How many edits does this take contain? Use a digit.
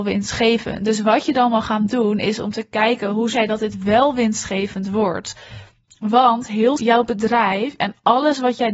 2